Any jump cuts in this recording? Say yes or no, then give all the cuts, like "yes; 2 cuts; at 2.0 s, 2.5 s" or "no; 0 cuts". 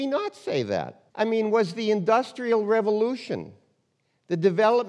yes; 1 cut; at 1.1 s